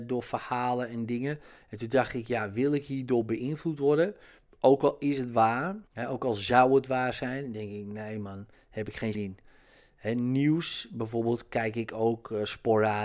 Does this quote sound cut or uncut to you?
cut